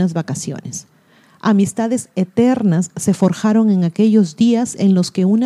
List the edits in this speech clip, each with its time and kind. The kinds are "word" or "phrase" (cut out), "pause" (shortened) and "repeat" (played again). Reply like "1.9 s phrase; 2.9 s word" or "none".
none